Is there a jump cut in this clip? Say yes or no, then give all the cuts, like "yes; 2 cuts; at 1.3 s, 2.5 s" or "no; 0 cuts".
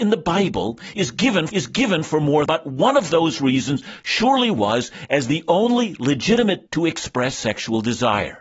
yes; 3 cuts; at 1.5 s, 2.5 s, 6.7 s